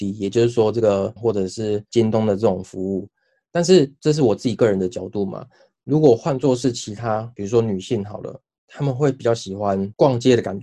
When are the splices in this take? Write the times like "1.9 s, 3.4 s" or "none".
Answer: 1.2 s